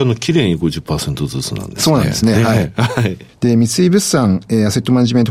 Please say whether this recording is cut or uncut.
uncut